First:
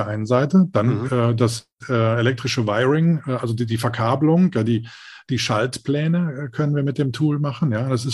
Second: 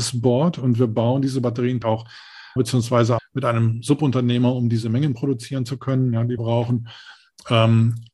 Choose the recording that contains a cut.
second; 4 cuts; at 1.8 s, 2.6 s, 3.2 s, 6.4 s

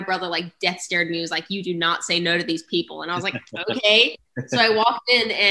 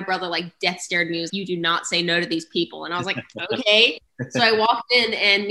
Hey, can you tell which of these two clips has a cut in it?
second; 1 cut; at 1.3 s

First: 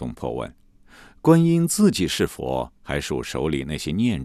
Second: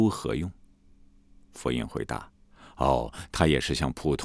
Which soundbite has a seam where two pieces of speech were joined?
first; 1 cut; at 2.8 s

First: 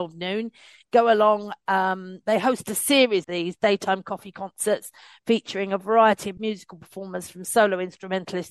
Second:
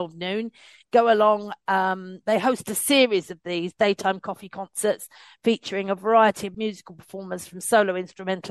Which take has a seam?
first; 1 cut; at 3.2 s

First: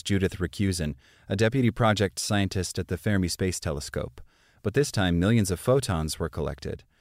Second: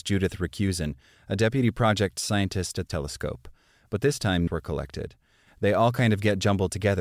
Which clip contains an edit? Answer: second; 2 cuts; at 2.9 s, 4.5 s

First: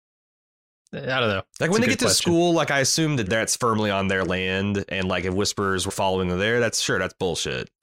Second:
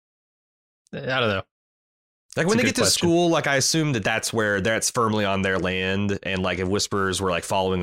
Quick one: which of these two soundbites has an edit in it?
first; 3 cuts; at 1.5 s, 3.3 s, 5.9 s

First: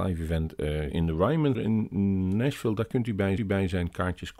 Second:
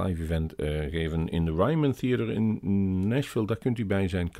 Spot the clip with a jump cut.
first; 3 cuts; at 0.9 s, 1.5 s, 3.4 s

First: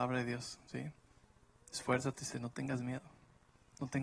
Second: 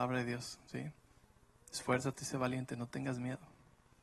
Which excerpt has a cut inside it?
first; 1 cut; at 2.3 s

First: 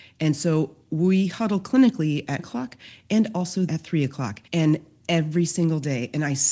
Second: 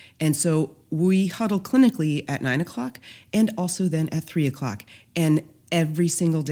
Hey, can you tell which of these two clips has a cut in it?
first; 3 cuts; at 2.4 s, 3.7 s, 4.5 s

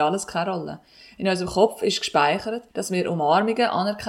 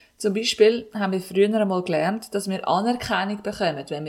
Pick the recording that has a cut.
first; 1 cut; at 2.7 s

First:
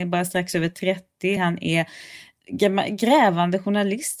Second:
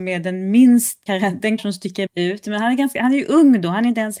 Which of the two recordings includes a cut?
second; 3 cuts; at 1.1 s, 1.6 s, 2.1 s

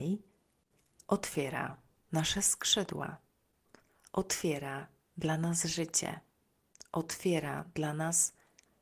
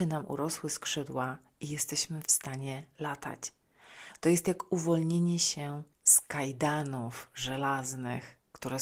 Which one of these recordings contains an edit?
second; 1 cut; at 5.9 s

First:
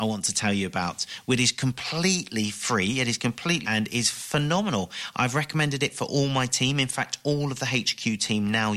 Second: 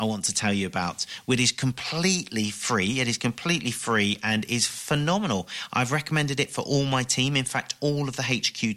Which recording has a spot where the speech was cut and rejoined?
first; 1 cut; at 3.6 s

